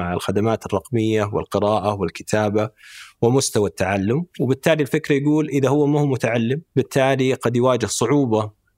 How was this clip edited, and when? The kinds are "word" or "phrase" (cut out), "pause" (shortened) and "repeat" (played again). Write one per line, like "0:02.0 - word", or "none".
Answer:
0:06.7 - pause